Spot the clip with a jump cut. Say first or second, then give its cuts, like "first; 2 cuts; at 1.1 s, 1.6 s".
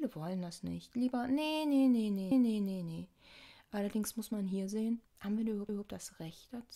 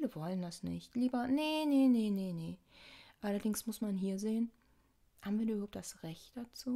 first; 3 cuts; at 2.3 s, 5.0 s, 5.7 s